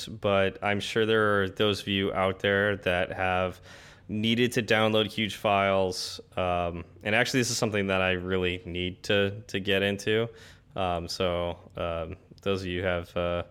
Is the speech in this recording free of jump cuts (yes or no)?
yes